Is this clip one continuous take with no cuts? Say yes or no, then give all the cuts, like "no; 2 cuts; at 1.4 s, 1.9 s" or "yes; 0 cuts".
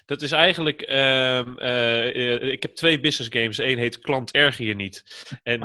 yes; 0 cuts